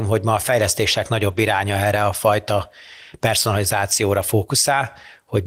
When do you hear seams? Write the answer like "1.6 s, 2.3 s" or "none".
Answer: none